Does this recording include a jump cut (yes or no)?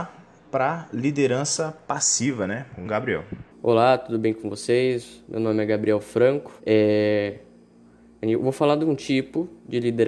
yes